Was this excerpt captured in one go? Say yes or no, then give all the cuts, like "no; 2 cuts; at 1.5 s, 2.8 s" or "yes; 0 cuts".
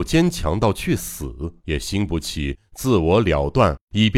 no; 1 cut; at 1.6 s